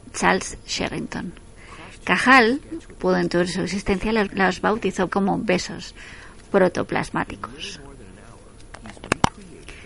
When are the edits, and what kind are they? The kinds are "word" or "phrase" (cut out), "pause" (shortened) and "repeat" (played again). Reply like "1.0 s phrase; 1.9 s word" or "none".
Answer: 3.0 s word; 4.3 s word; 5.1 s word